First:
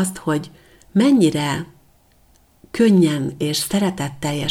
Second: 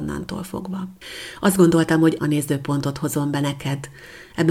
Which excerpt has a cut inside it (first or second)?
second